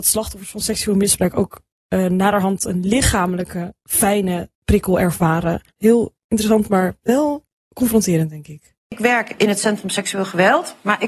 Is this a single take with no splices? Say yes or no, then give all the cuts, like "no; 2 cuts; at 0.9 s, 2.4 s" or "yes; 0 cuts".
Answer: no; 4 cuts; at 4.5 s, 5.7 s, 8.8 s, 9.4 s